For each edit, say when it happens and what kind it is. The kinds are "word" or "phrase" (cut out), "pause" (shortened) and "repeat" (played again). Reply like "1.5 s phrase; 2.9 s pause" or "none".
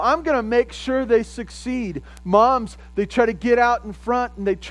none